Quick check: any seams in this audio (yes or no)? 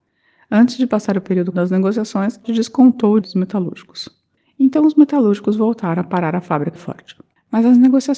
yes